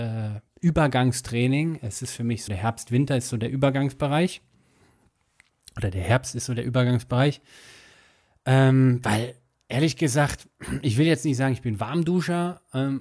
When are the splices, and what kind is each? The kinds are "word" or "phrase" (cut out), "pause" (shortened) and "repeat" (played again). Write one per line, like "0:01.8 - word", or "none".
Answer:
0:02.5 - word